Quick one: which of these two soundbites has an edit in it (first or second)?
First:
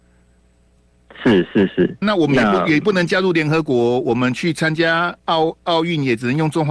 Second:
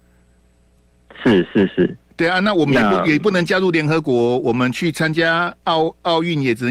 first